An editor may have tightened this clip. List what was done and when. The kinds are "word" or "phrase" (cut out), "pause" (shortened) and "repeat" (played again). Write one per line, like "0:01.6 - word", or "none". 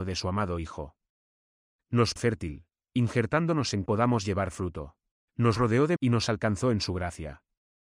0:02.2 - phrase
0:02.8 - word
0:03.9 - phrase
0:05.2 - pause
0:06.0 - word